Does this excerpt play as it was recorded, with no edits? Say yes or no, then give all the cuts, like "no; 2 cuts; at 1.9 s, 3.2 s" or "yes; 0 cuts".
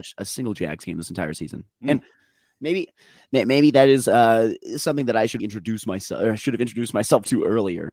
no; 1 cut; at 5.4 s